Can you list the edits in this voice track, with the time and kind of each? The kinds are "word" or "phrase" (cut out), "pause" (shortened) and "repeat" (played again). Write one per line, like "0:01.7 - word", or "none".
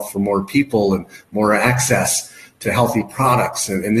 none